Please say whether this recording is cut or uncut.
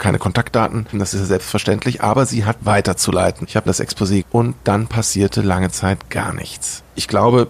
cut